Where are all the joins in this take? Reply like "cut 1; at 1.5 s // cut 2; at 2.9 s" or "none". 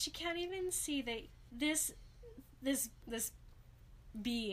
cut 1; at 1.5 s // cut 2; at 3.0 s